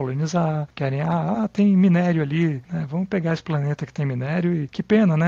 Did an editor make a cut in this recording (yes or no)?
no